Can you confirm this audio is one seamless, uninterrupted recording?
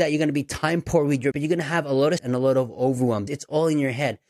no; 3 cuts; at 1.3 s, 2.2 s, 3.3 s

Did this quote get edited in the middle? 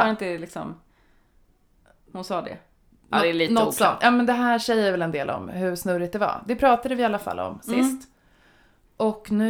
no; 0 cuts

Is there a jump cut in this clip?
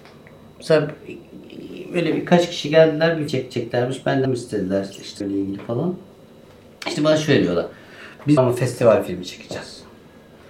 yes; 4 cuts; at 3.3 s, 4.2 s, 5.2 s, 8.4 s

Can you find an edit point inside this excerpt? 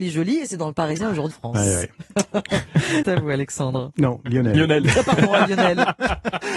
yes; 2 cuts; at 1.3 s, 3.0 s

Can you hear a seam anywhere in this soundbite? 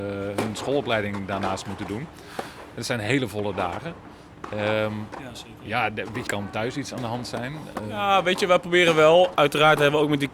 yes; 1 cut; at 6.3 s

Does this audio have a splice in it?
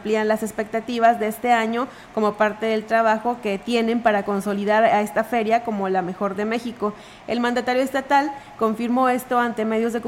no; 0 cuts

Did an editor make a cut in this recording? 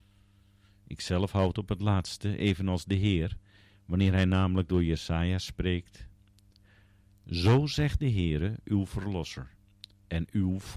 no; 0 cuts

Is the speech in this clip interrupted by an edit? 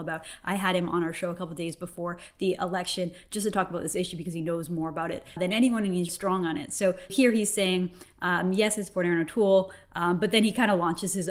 yes; 3 cuts; at 5.4 s, 6.1 s, 7.1 s

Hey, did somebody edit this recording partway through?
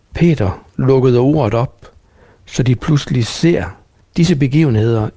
no; 0 cuts

